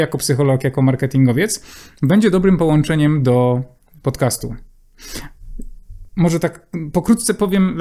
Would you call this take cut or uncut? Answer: uncut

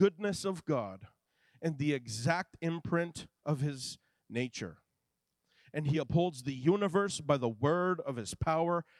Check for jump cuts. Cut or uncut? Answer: uncut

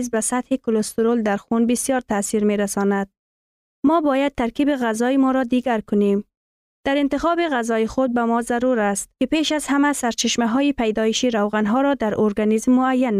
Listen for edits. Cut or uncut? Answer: uncut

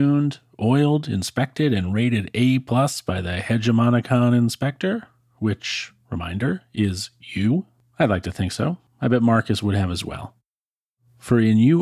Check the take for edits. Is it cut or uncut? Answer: uncut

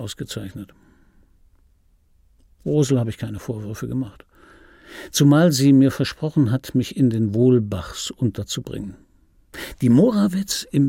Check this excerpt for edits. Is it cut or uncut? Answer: uncut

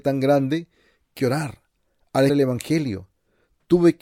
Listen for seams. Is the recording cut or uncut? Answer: cut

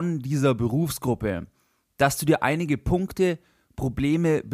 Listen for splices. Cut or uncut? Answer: uncut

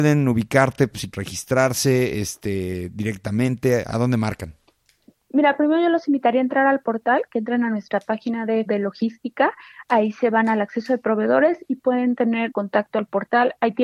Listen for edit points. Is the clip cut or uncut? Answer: cut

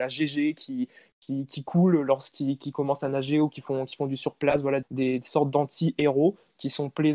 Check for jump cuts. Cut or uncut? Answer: cut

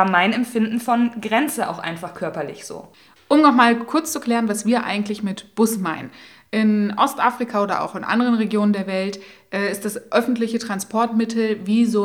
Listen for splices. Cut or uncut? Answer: uncut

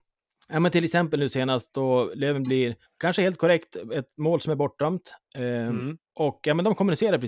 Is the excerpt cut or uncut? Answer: cut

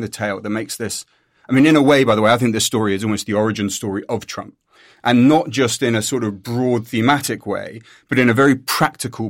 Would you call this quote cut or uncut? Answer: uncut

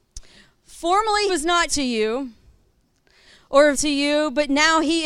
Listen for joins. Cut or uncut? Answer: cut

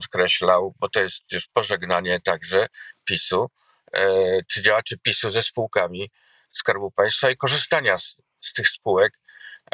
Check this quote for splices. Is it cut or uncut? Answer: uncut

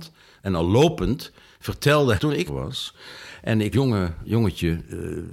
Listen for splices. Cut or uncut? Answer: cut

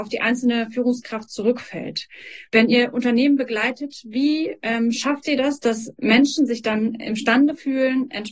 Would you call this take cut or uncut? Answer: cut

